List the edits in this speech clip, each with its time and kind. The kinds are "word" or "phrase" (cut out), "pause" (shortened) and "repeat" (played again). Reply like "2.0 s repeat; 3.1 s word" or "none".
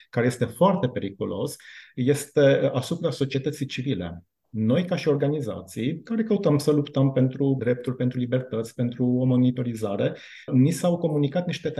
7.6 s word; 10.5 s word